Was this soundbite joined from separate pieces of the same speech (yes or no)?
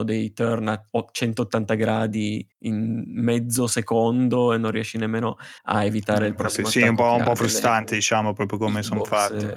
yes